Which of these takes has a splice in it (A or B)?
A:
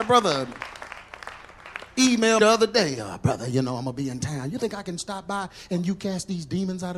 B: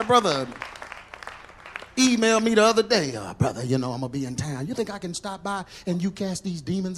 A